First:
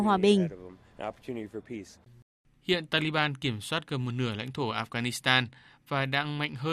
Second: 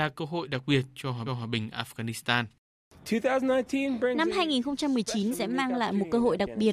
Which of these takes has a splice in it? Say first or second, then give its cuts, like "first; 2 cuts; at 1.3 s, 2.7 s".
second; 2 cuts; at 1.3 s, 5.3 s